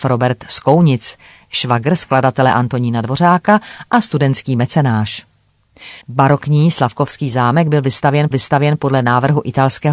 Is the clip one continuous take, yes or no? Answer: no